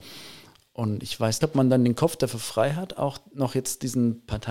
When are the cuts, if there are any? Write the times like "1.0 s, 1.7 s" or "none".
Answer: 1.4 s